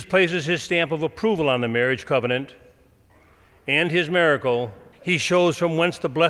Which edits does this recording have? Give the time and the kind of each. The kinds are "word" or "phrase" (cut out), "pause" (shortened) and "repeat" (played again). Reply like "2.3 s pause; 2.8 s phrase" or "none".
4.9 s pause